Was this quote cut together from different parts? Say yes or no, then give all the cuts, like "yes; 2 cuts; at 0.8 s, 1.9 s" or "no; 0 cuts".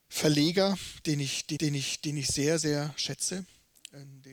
yes; 1 cut; at 1.6 s